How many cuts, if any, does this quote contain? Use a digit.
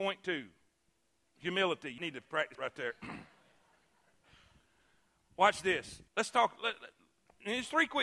3